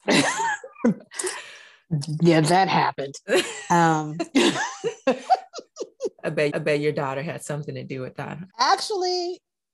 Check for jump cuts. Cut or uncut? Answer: cut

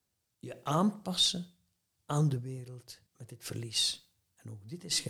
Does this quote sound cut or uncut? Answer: cut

